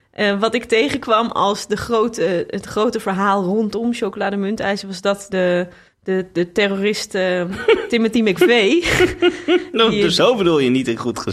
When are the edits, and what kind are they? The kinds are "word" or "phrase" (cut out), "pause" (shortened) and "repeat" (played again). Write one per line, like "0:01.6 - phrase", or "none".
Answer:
0:05.3 - word
0:05.9 - pause